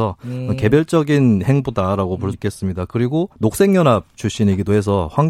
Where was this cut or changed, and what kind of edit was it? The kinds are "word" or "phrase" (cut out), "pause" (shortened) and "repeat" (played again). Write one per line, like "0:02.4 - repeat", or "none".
0:02.3 - word
0:03.3 - pause